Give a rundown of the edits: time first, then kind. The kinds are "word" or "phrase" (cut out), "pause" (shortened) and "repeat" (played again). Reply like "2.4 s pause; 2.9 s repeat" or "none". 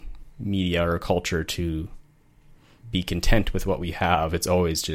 none